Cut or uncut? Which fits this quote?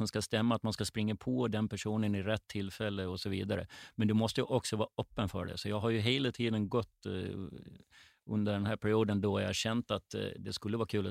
uncut